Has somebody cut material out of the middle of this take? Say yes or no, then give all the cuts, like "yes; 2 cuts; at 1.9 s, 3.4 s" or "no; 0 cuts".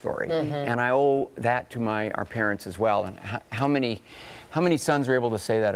no; 0 cuts